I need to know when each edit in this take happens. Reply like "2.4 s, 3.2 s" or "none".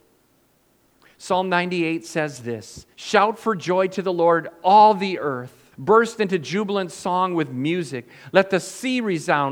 2.9 s, 5.7 s